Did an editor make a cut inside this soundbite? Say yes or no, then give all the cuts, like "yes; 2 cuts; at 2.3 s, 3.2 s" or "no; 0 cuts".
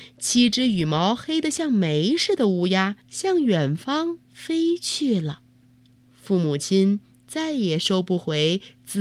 yes; 3 cuts; at 3.0 s, 4.2 s, 6.0 s